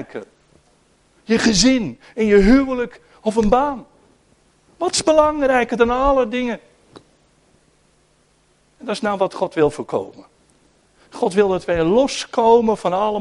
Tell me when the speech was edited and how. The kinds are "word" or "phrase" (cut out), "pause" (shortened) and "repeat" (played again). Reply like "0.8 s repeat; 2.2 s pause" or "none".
none